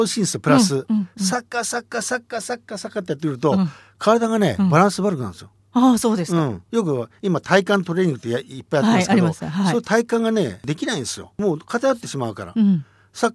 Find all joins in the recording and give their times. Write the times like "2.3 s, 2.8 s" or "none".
5.6 s